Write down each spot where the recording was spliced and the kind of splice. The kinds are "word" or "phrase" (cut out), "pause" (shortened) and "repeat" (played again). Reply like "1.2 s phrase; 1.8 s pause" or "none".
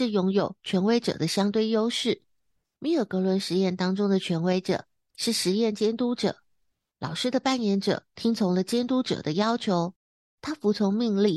none